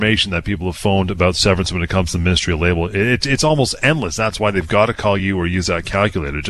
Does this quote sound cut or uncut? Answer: uncut